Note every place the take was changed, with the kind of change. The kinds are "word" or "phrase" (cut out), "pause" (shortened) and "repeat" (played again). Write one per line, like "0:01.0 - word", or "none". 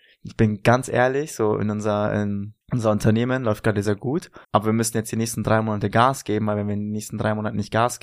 0:02.6 - pause
0:03.8 - word
0:04.4 - pause